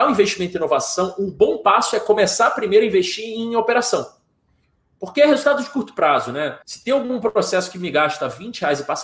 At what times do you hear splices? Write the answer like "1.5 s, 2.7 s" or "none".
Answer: 6.6 s

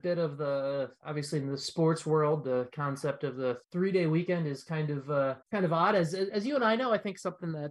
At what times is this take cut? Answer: 3.6 s, 5.4 s

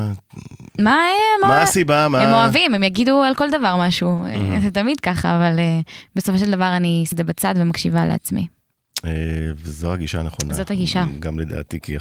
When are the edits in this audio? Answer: 7.1 s

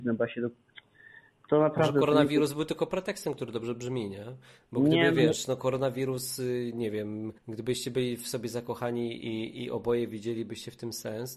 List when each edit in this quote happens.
7.4 s

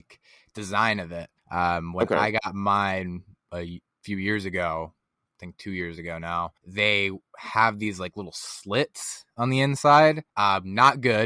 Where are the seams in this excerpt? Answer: 1.4 s, 6.6 s, 10.3 s

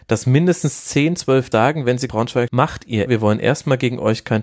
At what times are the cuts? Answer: 1.5 s, 2.1 s, 2.5 s, 3.1 s

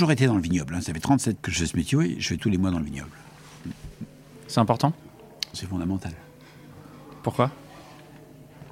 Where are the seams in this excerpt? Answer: 1.4 s, 2.4 s, 5.5 s

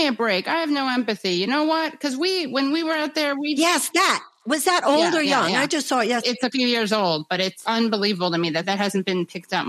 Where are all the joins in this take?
none

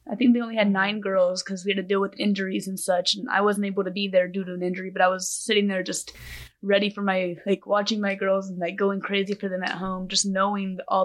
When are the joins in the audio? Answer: none

